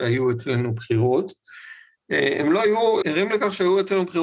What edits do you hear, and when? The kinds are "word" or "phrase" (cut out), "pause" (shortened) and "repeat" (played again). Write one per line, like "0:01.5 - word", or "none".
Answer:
0:03.0 - word